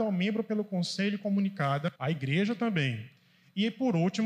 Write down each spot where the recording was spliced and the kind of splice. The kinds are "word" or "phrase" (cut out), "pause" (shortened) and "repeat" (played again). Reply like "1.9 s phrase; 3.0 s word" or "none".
2.0 s pause